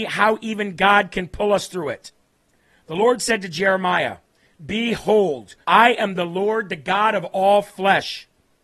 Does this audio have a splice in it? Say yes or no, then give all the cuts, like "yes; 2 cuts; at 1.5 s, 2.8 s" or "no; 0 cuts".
yes; 2 cuts; at 2.3 s, 5.6 s